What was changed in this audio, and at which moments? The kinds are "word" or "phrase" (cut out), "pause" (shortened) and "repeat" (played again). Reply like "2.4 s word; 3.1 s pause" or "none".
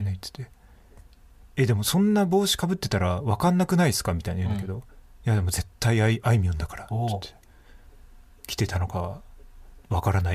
none